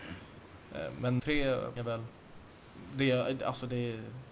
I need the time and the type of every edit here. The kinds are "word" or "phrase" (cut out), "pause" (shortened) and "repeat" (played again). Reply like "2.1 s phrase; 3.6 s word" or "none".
1.2 s word; 1.8 s word